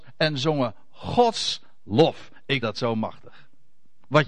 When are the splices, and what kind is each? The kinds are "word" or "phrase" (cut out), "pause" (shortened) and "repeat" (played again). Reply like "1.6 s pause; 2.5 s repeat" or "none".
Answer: 2.6 s word